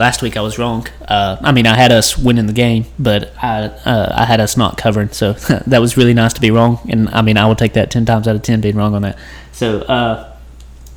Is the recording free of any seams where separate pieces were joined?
yes; 0 cuts

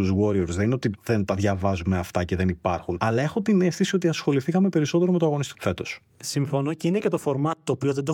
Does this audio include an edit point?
yes; 1 cut; at 5.5 s

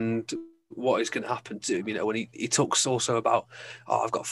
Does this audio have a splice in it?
no; 0 cuts

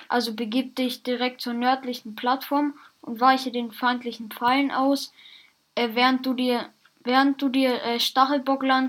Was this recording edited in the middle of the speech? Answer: no; 0 cuts

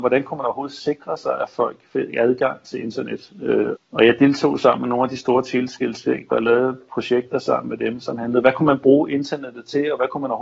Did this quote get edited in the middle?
yes; 1 cut; at 3.8 s

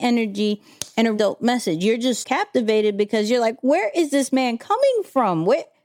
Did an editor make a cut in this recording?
yes; 2 cuts; at 1.2 s, 2.2 s

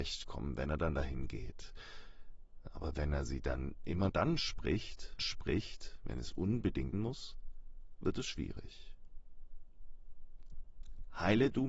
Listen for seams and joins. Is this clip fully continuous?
no; 3 cuts; at 4.1 s, 5.2 s, 6.9 s

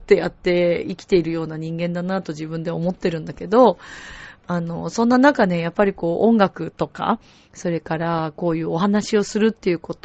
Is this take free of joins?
yes; 0 cuts

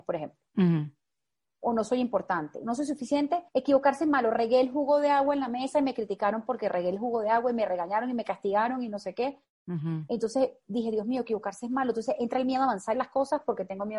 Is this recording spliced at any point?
yes; 2 cuts; at 3.5 s, 12.9 s

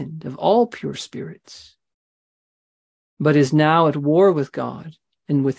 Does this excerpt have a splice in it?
no; 0 cuts

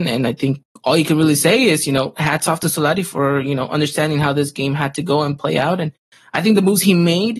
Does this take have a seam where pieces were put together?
no; 0 cuts

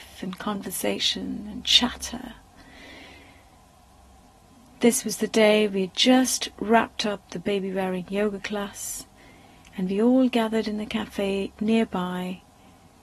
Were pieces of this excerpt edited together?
no; 0 cuts

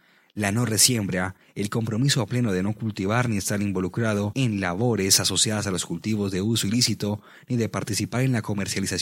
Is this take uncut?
yes; 0 cuts

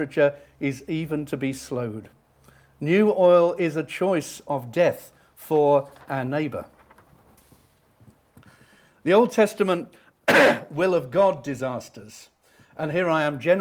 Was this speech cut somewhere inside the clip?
no; 0 cuts

